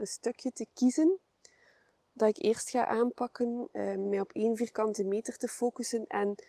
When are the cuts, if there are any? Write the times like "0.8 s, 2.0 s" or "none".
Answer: none

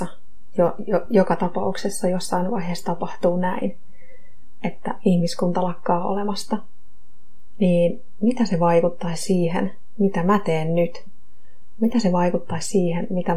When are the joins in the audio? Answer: none

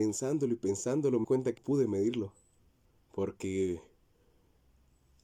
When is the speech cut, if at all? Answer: 1.2 s, 1.6 s, 2.9 s

